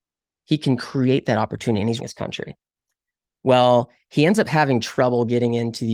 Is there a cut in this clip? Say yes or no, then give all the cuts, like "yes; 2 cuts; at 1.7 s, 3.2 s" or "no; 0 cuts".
yes; 1 cut; at 2.0 s